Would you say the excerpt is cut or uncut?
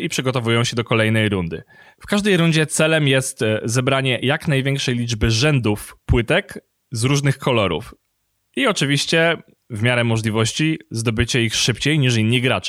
uncut